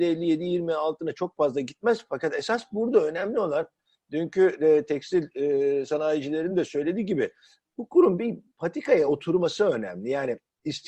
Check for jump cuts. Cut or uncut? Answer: uncut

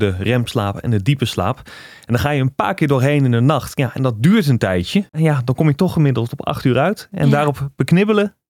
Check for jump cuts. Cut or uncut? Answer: cut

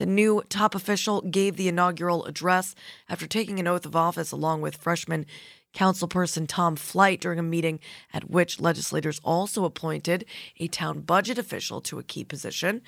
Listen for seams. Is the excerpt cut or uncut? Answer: uncut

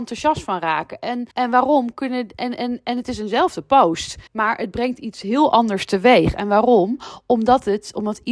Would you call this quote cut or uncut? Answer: cut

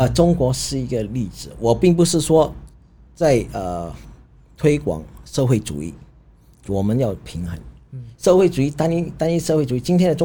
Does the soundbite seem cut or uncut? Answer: uncut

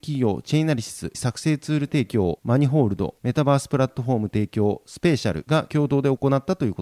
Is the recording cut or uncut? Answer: cut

